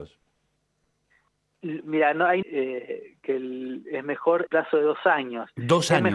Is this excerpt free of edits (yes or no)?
no